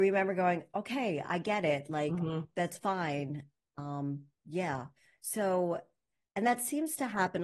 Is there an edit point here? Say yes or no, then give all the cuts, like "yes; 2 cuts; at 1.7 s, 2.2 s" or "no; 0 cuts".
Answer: no; 0 cuts